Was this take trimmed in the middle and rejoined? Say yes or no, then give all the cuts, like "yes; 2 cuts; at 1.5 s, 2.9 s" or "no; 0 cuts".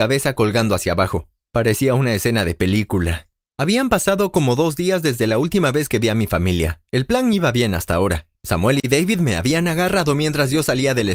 no; 0 cuts